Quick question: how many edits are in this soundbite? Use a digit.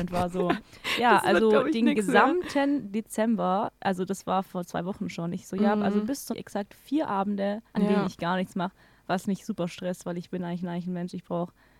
3